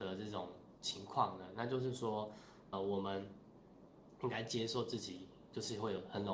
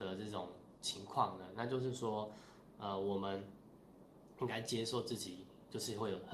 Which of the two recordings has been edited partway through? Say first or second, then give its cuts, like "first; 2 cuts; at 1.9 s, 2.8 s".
first; 1 cut; at 2.7 s